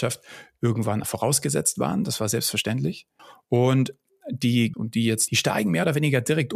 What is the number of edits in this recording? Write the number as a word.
four